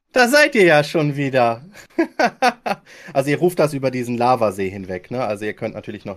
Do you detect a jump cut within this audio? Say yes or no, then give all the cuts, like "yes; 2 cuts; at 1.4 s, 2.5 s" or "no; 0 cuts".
no; 0 cuts